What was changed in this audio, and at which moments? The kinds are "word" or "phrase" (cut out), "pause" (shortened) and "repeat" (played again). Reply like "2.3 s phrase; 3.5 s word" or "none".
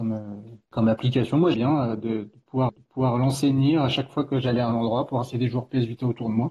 1.5 s word; 2.7 s repeat